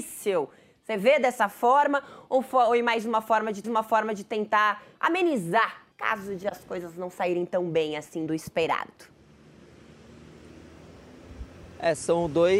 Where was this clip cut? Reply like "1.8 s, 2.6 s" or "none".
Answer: 3.6 s, 5.9 s, 8.3 s